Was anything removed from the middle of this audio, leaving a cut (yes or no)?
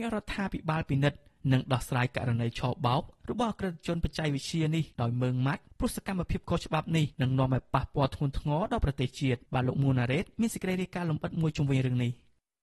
yes